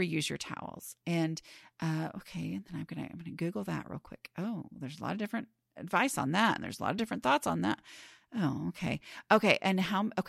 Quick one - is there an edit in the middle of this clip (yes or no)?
no